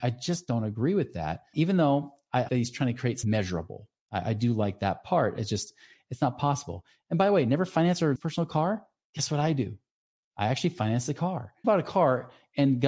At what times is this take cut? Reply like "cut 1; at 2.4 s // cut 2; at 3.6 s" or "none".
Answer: cut 1; at 2.5 s // cut 2; at 3.2 s // cut 3; at 8.2 s // cut 4; at 11.6 s